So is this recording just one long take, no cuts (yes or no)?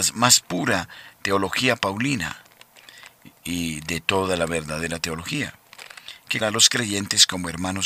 no